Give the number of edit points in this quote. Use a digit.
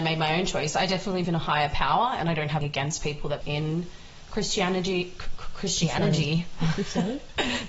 3